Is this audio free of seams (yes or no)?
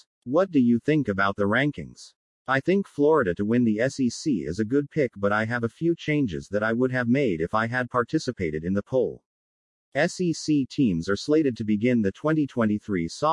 yes